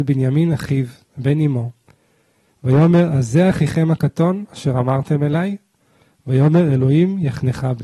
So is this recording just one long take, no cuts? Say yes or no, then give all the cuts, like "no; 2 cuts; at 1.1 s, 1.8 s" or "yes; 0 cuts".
yes; 0 cuts